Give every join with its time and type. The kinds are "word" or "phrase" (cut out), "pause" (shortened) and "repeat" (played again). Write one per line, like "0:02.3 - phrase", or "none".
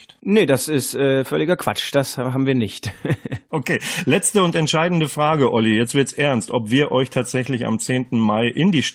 none